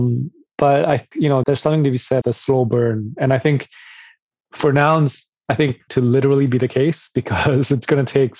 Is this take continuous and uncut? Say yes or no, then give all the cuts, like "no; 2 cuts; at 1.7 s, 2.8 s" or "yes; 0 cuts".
no; 6 cuts; at 1.1 s, 1.4 s, 2.2 s, 4.5 s, 5.5 s, 5.9 s